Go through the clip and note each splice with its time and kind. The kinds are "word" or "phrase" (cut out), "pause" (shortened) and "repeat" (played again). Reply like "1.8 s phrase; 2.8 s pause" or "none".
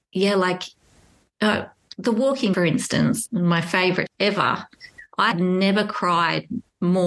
2.5 s word; 3.3 s word; 4.1 s word; 5.3 s word